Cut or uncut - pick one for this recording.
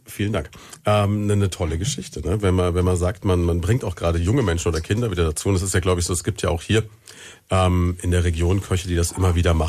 uncut